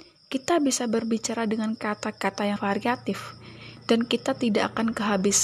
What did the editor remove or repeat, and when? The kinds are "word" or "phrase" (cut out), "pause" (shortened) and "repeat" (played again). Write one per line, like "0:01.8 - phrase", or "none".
0:02.6 - word